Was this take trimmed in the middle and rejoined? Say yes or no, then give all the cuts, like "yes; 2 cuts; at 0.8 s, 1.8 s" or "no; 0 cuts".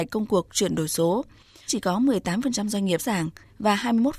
yes; 2 cuts; at 1.7 s, 3.0 s